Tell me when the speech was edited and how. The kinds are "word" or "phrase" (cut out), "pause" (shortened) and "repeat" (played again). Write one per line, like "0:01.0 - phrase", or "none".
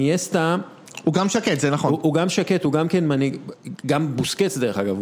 none